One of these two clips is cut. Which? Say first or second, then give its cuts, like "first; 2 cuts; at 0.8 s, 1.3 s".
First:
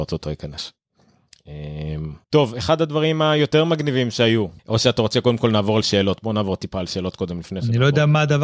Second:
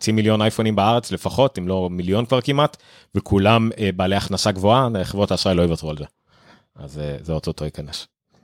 first; 2 cuts; at 2.2 s, 4.6 s